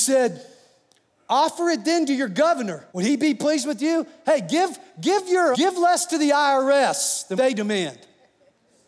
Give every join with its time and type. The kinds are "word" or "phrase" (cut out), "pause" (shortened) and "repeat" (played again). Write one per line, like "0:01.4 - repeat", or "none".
0:02.9 - pause
0:05.5 - word
0:07.4 - word